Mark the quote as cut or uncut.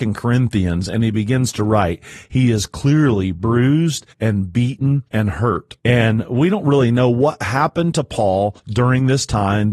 cut